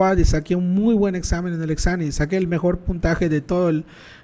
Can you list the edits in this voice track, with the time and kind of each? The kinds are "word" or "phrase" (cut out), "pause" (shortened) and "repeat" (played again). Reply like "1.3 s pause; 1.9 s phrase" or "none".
none